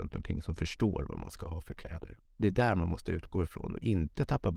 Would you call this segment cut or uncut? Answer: cut